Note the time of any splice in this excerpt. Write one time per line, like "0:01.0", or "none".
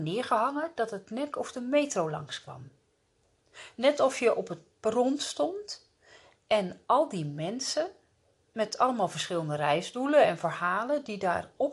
0:01.3

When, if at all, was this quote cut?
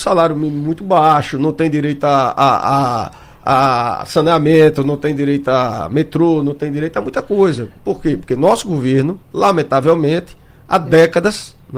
0:09.2

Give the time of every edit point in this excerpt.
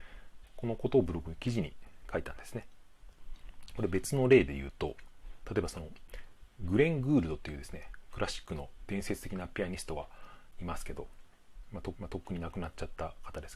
0:11.9

